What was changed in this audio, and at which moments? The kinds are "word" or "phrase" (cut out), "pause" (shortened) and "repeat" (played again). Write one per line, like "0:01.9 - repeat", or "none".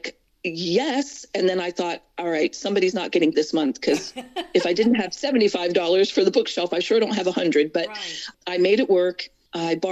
0:03.3 - word